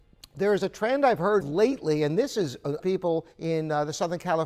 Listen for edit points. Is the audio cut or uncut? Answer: cut